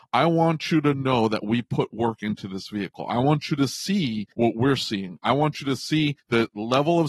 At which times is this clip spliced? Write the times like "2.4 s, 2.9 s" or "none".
4.3 s, 6.2 s

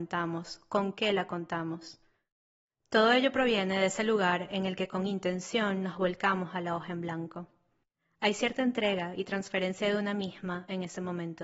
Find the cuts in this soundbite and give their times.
none

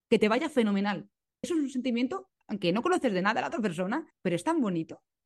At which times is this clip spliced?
1.4 s, 4.1 s

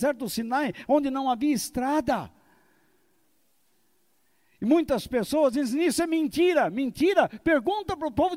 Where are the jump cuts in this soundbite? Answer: none

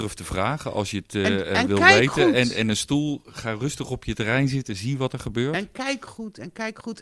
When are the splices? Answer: none

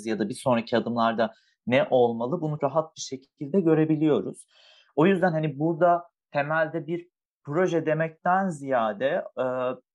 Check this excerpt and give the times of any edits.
2.6 s

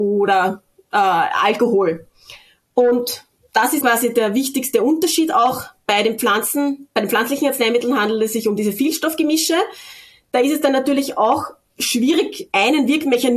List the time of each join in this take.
3.8 s

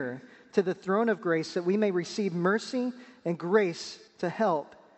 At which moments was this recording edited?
4.1 s

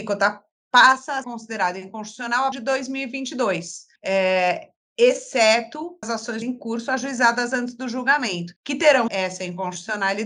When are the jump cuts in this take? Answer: 1.2 s, 2.5 s, 4.0 s, 6.0 s, 6.4 s, 8.6 s, 9.1 s

